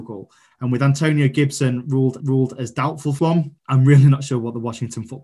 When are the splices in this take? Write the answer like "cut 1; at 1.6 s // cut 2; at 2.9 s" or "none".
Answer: cut 1; at 2.2 s // cut 2; at 3.2 s // cut 3; at 3.6 s

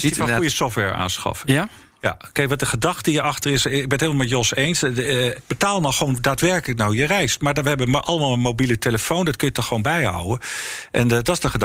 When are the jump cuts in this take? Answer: none

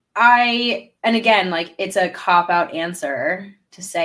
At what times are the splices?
cut 1; at 1.0 s

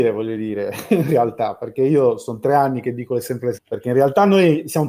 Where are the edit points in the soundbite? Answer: cut 1; at 3.5 s

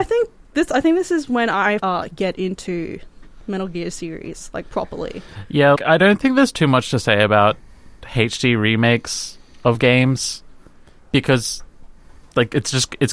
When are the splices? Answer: cut 1; at 1.8 s // cut 2; at 5.8 s

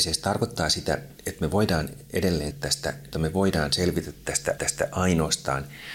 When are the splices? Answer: cut 1; at 2.5 s // cut 2; at 3.1 s // cut 3; at 4.6 s

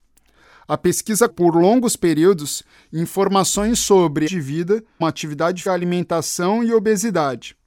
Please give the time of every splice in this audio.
cut 1; at 1.3 s // cut 2; at 4.3 s // cut 3; at 5.0 s // cut 4; at 5.7 s

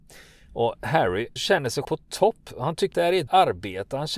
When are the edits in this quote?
cut 1; at 1.4 s // cut 2; at 1.8 s // cut 3; at 2.9 s // cut 4; at 3.3 s

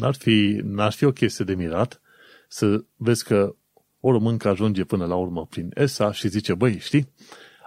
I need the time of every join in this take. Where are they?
none

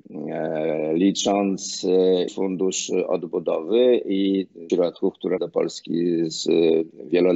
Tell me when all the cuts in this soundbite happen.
cut 1; at 2.3 s // cut 2; at 4.7 s // cut 3; at 5.4 s

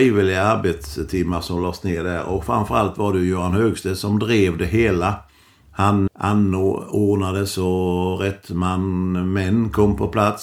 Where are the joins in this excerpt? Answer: cut 1; at 6.1 s

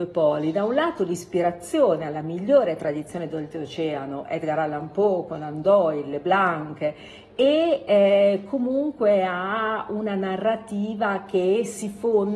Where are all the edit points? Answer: none

